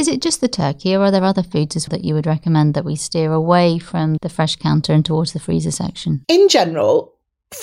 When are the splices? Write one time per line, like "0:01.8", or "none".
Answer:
0:01.9
0:04.2
0:06.2